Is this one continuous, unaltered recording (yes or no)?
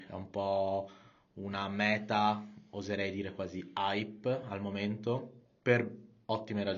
yes